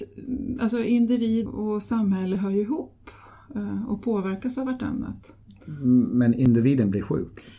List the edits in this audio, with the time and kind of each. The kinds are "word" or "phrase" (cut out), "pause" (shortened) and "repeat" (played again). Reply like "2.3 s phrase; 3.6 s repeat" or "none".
1.4 s word